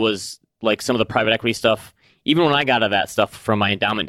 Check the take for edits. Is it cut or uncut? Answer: uncut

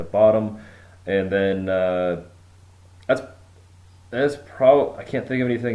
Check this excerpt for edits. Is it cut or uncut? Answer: uncut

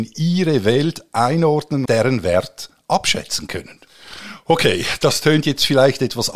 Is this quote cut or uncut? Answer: cut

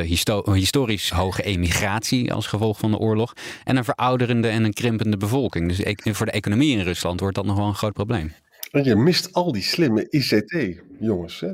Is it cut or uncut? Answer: cut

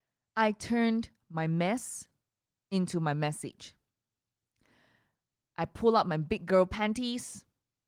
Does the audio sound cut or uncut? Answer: uncut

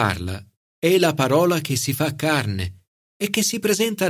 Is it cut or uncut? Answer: uncut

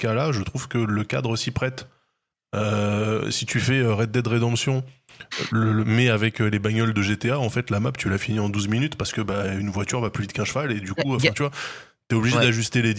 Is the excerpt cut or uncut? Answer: uncut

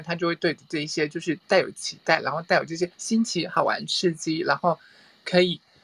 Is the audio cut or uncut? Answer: cut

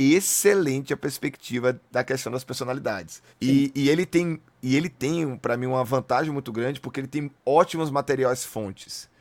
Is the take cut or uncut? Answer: cut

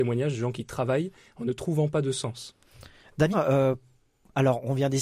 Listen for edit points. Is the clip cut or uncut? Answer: cut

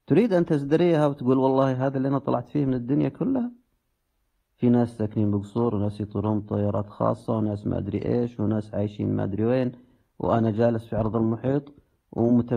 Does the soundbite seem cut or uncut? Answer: uncut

